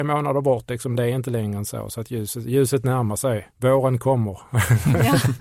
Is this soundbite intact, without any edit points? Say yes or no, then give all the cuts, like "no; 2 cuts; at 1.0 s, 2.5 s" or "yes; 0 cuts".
no; 1 cut; at 3.5 s